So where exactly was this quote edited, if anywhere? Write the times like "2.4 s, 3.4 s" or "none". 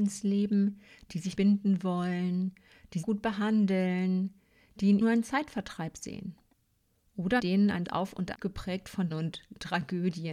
1.4 s, 3.0 s, 5.0 s, 7.4 s, 7.8 s, 8.3 s, 9.1 s